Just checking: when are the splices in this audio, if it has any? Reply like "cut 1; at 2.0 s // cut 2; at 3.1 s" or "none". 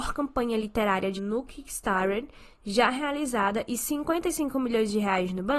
cut 1; at 1.1 s